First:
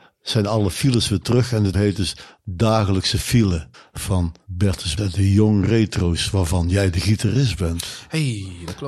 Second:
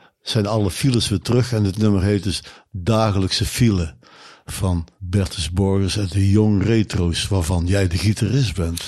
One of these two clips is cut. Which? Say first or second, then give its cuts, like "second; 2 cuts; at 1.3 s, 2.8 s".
first; 3 cuts; at 1.7 s, 3.7 s, 5.0 s